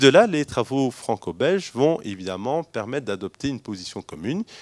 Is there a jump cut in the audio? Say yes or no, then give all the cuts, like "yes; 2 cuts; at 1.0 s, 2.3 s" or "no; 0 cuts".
no; 0 cuts